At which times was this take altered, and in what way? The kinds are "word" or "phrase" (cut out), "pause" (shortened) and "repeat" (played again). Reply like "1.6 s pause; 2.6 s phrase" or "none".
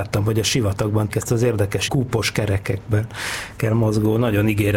1.1 s word; 1.9 s word